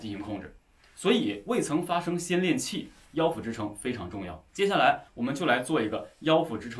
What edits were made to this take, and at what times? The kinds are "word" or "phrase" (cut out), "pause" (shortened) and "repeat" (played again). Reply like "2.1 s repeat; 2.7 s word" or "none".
4.5 s pause; 5.1 s pause